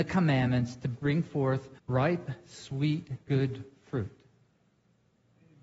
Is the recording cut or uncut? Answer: cut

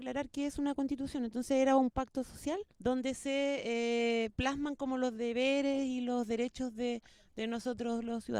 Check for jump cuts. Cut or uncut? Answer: cut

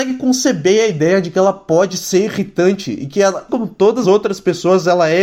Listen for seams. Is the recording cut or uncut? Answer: cut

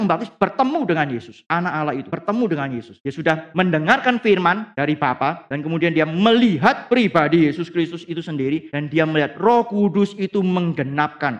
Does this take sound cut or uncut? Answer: uncut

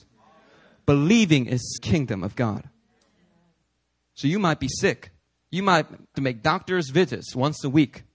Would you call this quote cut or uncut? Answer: cut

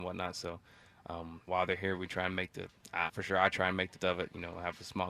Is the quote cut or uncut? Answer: cut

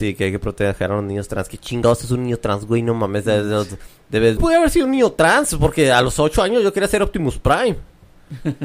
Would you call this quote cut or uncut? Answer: cut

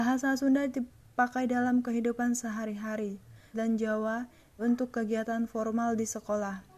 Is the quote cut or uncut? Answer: cut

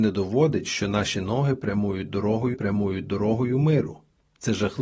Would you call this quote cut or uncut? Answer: cut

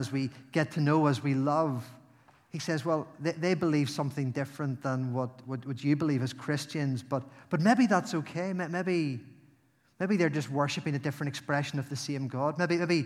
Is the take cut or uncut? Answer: cut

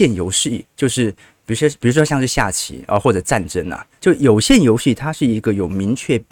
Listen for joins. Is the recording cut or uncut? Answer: uncut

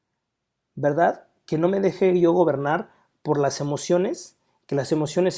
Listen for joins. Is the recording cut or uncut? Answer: uncut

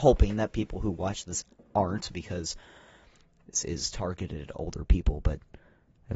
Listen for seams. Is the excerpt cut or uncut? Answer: uncut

